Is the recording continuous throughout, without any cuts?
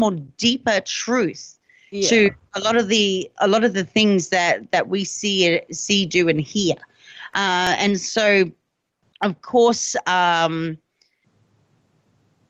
yes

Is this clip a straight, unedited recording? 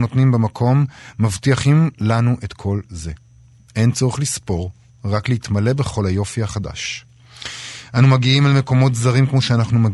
yes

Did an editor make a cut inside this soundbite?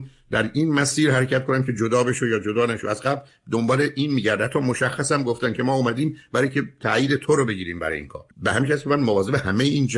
yes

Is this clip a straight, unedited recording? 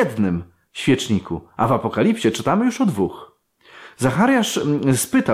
yes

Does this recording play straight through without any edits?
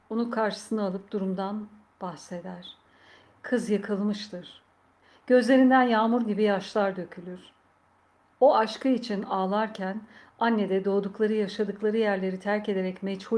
yes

